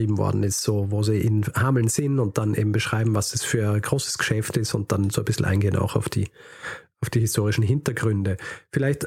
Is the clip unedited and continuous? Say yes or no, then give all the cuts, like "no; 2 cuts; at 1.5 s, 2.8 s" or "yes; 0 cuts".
yes; 0 cuts